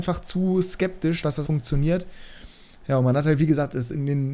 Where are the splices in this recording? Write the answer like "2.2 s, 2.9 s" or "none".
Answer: 1.4 s